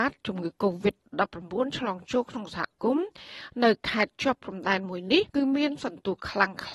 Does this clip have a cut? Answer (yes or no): yes